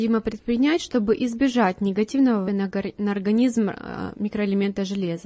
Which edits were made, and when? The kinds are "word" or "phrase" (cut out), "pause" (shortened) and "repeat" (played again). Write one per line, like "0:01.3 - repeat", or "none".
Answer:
0:02.4 - word